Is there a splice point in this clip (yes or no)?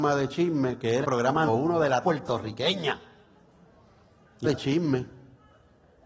yes